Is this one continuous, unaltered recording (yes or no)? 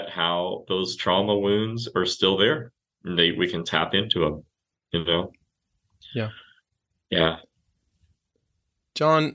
yes